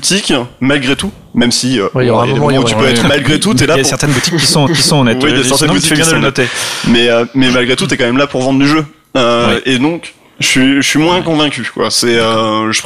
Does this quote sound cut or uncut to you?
cut